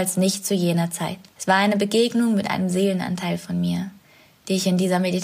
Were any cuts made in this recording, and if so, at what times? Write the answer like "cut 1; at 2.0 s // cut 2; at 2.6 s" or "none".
cut 1; at 1.3 s